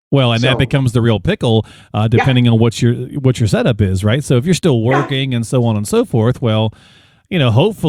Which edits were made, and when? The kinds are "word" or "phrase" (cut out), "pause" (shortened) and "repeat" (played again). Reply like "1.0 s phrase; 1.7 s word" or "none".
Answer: none